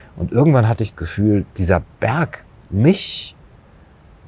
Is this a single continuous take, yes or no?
no